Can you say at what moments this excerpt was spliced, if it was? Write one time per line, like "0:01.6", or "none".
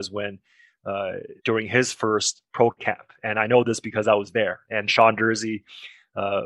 0:01.4